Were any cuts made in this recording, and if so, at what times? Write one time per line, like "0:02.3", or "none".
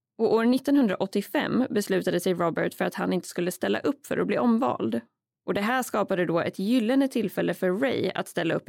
none